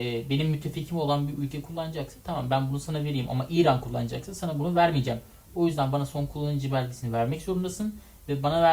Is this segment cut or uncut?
uncut